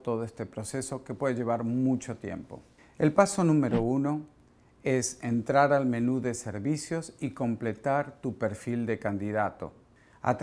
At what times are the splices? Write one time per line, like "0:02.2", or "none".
none